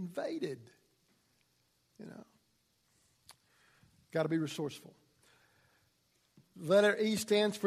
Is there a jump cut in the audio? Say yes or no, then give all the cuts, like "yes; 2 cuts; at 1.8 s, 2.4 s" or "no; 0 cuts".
no; 0 cuts